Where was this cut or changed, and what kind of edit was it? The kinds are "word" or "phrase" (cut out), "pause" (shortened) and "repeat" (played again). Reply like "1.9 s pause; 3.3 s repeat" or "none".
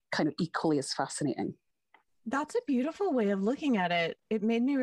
none